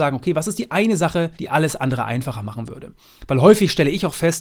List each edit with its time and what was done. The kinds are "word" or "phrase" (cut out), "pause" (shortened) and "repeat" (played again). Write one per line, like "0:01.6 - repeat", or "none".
0:01.3 - pause